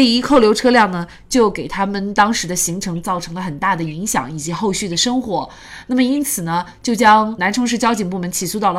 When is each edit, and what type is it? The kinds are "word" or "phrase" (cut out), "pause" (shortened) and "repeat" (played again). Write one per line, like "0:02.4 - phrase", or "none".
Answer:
none